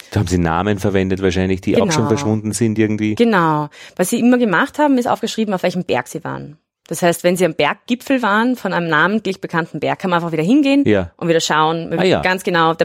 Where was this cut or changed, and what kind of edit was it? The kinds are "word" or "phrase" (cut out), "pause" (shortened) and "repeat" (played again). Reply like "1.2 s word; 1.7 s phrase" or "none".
none